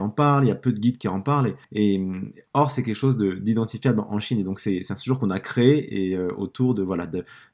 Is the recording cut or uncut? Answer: cut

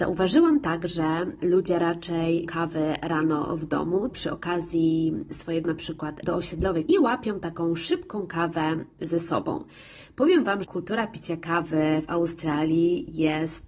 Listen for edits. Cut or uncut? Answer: cut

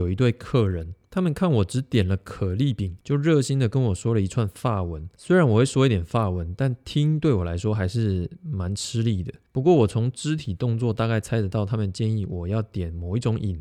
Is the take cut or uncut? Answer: uncut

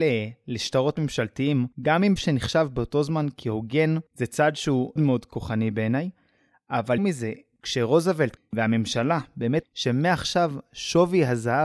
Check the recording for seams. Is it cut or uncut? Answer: cut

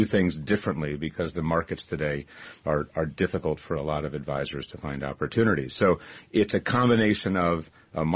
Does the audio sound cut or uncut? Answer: uncut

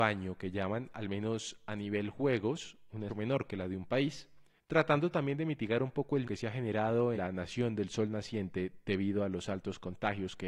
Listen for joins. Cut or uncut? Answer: cut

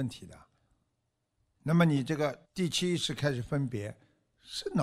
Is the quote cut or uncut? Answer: cut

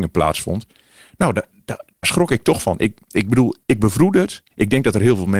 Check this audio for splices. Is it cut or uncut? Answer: cut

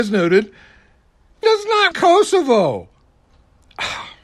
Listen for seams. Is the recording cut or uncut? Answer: cut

